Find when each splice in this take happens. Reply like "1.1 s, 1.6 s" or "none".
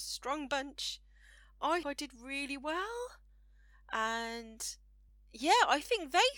1.8 s, 5.1 s